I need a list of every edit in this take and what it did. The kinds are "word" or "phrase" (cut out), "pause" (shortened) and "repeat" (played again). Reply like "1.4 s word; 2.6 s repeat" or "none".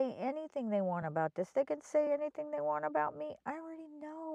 none

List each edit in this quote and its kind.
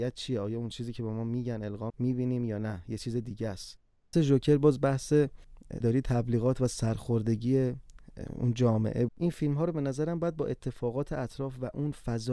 1.9 s word; 4.1 s word; 5.8 s word; 9.1 s word

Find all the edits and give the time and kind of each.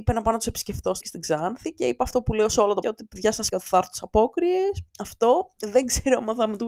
1.0 s word; 2.8 s word; 3.5 s word; 4.9 s pause

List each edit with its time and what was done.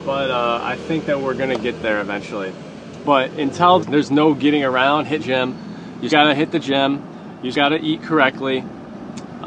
3.8 s word; 5.2 s word; 6.1 s word; 7.5 s word

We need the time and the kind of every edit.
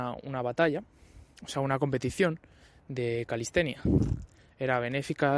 none

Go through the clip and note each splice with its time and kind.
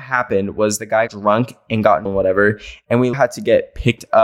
1.1 s word; 2.1 s word; 3.1 s word

